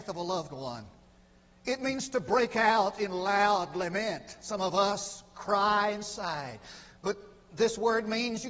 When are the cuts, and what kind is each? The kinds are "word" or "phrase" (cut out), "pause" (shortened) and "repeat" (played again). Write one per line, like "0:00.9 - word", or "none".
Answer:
none